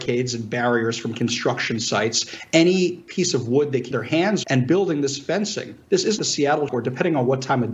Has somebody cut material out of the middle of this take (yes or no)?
yes